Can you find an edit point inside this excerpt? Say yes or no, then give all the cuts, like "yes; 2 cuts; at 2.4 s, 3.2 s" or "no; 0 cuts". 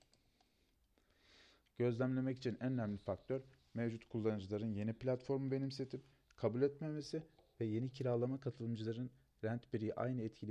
no; 0 cuts